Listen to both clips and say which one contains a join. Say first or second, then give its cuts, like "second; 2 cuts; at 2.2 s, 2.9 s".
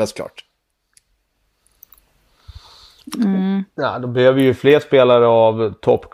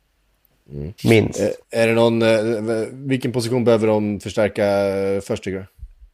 second; 2 cuts; at 1.0 s, 1.6 s